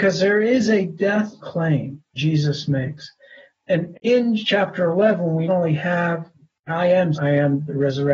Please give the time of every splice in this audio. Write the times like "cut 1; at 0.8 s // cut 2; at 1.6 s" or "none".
cut 1; at 1.4 s // cut 2; at 2.2 s // cut 3; at 3.9 s // cut 4; at 5.5 s // cut 5; at 6.7 s // cut 6; at 7.1 s